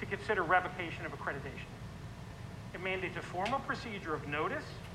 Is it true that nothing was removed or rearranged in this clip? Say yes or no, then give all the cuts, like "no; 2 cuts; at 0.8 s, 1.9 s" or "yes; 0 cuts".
yes; 0 cuts